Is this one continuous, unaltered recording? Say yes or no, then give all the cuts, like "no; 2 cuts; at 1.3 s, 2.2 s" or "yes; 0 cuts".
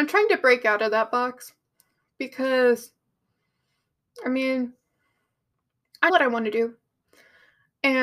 no; 1 cut; at 6.1 s